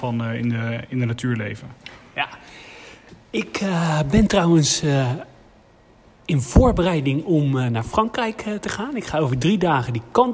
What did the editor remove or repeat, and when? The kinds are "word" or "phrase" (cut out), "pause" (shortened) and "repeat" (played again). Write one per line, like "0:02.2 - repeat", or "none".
none

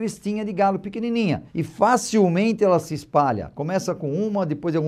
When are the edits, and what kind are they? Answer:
0:01.5 - pause

